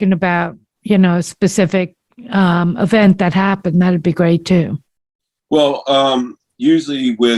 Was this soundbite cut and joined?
no; 0 cuts

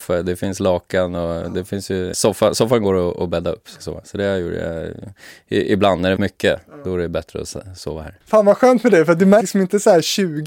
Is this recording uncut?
no; 5 cuts; at 2.1 s, 3.8 s, 6.2 s, 8.2 s, 9.4 s

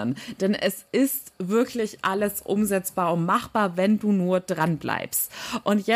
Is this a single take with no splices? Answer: yes; 0 cuts

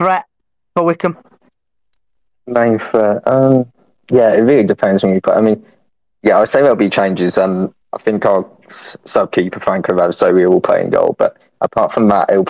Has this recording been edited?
no; 0 cuts

